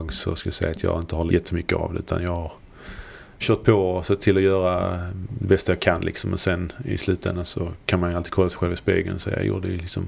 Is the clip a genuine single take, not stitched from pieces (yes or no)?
no